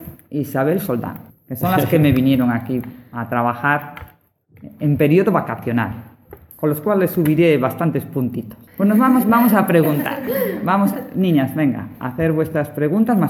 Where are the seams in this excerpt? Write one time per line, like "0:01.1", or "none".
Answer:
0:01.3
0:08.7